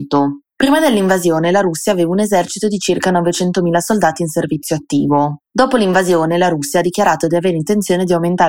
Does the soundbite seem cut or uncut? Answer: uncut